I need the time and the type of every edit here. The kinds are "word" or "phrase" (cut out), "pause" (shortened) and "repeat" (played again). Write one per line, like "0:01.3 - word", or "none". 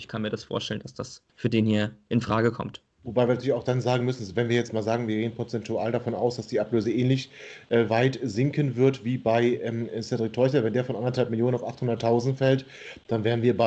0:01.3 - pause